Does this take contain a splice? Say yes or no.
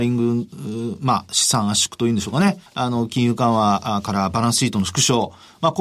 yes